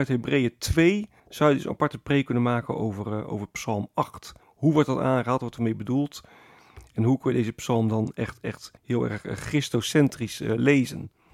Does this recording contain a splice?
yes; 3 cuts; at 1.2 s, 4.4 s, 8.8 s

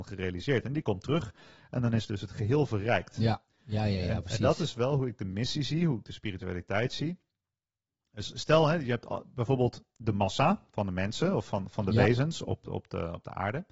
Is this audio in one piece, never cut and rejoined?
yes; 0 cuts

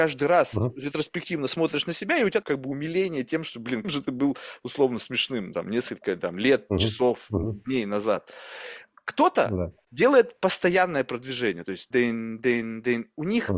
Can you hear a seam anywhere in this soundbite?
yes; 3 cuts; at 2.4 s, 3.8 s, 11.9 s

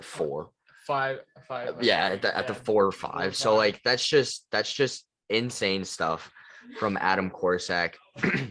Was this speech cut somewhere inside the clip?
no; 0 cuts

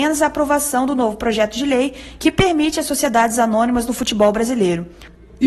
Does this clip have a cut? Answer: no; 0 cuts

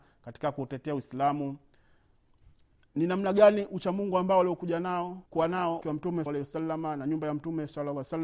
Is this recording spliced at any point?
yes; 3 cuts; at 5.3 s, 5.8 s, 6.3 s

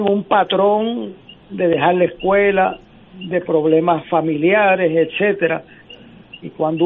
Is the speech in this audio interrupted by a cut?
no; 0 cuts

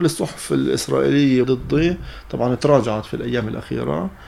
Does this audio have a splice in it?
yes; 1 cut; at 1.4 s

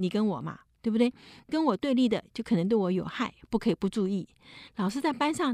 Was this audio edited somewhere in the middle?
no; 0 cuts

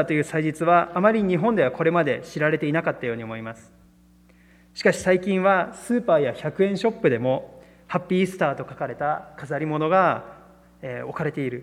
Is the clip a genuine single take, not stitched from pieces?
yes; 0 cuts

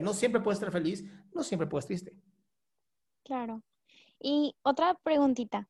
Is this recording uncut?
no; 2 cuts; at 1.8 s, 4.6 s

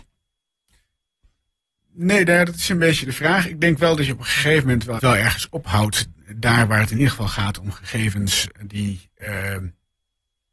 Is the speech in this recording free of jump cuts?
no; 1 cut; at 5.0 s

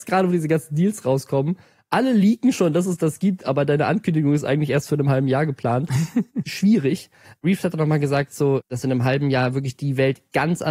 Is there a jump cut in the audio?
no; 0 cuts

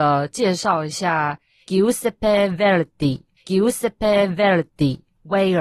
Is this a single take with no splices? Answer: no; 1 cut; at 3.4 s

